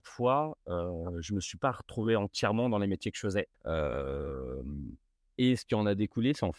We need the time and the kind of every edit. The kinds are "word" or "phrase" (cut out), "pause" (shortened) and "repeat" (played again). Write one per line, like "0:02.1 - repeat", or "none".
none